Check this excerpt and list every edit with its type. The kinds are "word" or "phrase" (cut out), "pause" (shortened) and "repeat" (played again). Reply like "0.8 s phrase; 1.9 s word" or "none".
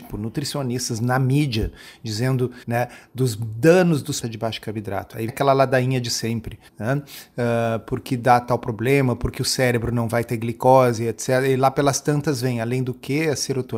2.6 s pause; 4.2 s phrase; 5.3 s word; 6.7 s pause